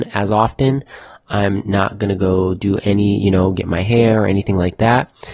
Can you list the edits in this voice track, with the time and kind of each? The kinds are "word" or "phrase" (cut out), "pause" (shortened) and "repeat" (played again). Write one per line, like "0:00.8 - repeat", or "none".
none